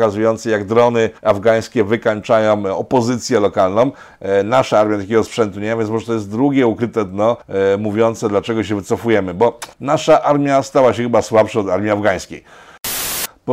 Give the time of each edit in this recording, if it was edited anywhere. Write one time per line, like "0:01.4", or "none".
0:01.2
0:07.4
0:09.7